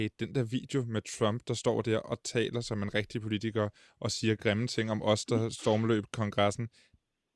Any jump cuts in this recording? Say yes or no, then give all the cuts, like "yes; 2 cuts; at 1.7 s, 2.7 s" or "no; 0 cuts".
no; 0 cuts